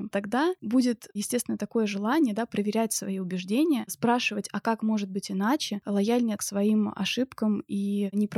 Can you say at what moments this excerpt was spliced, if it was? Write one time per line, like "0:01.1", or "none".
0:06.4